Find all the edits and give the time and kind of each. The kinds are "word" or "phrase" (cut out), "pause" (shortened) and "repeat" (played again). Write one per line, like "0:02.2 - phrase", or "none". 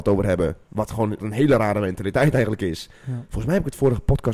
0:01.2 - word